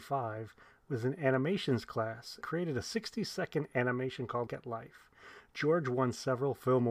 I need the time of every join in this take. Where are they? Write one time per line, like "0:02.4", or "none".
0:02.4
0:04.5